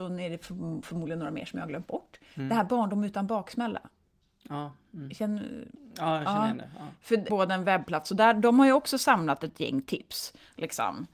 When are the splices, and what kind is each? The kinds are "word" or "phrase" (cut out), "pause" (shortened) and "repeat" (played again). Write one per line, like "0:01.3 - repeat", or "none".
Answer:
0:07.3 - phrase